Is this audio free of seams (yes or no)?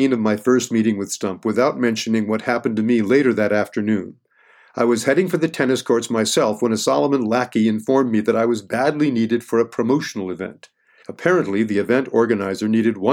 yes